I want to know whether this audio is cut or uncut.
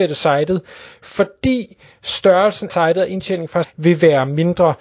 cut